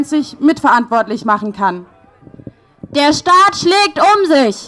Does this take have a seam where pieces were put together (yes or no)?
no